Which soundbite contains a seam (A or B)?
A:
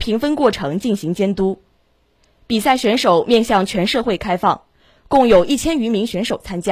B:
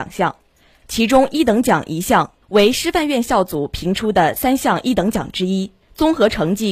B